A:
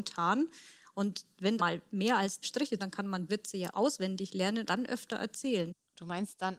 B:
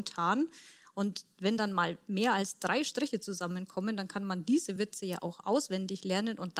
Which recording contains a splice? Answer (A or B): A